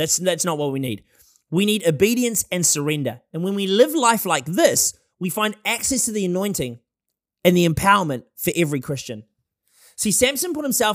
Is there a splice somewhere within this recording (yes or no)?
no